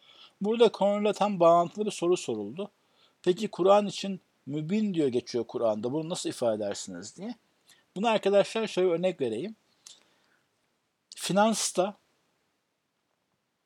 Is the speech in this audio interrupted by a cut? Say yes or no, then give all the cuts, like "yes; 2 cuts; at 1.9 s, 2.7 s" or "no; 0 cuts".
no; 0 cuts